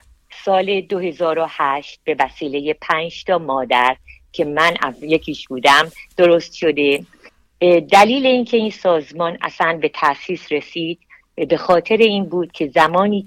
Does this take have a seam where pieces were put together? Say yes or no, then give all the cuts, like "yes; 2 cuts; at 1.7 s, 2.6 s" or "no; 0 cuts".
no; 0 cuts